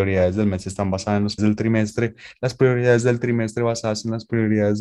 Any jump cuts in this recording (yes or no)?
yes